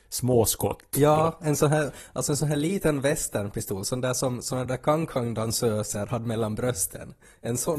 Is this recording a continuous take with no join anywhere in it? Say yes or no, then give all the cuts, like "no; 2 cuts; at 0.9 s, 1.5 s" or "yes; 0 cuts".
yes; 0 cuts